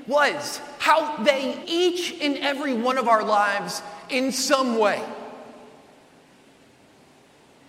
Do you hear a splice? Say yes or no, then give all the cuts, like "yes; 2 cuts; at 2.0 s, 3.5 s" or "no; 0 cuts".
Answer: yes; 1 cut; at 1.6 s